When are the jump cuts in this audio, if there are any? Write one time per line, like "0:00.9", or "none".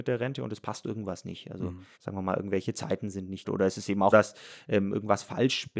0:01.9
0:03.4
0:04.1